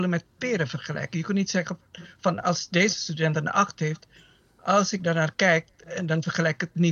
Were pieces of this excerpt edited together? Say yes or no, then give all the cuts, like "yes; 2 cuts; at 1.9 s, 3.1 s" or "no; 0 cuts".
no; 0 cuts